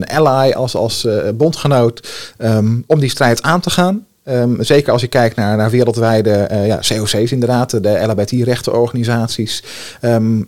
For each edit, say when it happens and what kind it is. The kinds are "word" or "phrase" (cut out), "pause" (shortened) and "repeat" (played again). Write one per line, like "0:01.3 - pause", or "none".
none